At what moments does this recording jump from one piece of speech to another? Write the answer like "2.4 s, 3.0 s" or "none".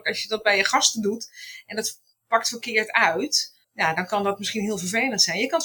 3.6 s